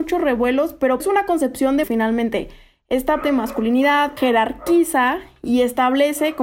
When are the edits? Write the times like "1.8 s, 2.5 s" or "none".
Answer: 1.0 s, 1.8 s, 3.2 s, 4.2 s